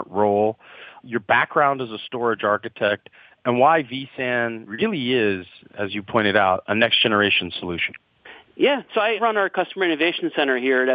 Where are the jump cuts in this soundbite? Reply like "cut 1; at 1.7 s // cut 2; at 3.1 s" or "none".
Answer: none